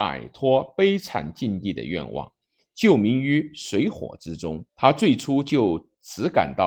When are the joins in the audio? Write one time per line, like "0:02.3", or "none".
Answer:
0:04.7